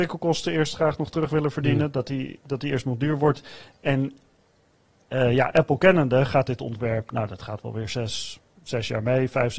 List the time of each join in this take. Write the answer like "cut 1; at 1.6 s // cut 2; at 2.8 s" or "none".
none